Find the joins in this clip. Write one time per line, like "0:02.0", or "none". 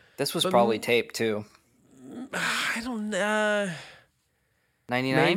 none